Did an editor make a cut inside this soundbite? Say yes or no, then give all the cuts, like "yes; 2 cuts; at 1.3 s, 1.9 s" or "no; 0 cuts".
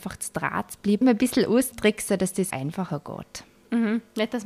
yes; 3 cuts; at 1.0 s, 1.7 s, 2.5 s